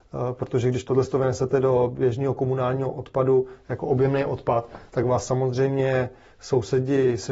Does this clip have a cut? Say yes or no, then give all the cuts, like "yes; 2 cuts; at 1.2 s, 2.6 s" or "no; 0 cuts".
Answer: no; 0 cuts